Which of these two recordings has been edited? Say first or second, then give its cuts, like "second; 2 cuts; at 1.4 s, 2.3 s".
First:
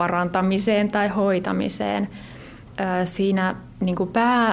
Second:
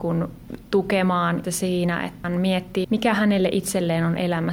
second; 3 cuts; at 1.4 s, 2.2 s, 2.8 s